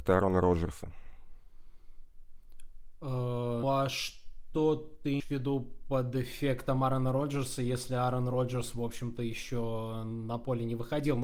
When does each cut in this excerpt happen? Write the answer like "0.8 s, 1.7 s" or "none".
3.6 s, 5.2 s